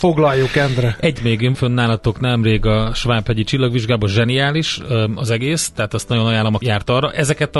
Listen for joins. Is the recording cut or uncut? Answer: cut